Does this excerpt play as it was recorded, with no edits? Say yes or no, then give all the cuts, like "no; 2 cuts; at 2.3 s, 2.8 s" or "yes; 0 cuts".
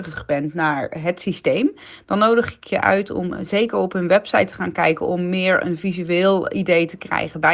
yes; 0 cuts